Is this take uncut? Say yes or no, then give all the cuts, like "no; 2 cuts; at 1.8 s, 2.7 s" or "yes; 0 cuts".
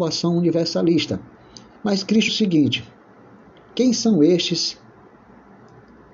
no; 2 cuts; at 1.8 s, 2.3 s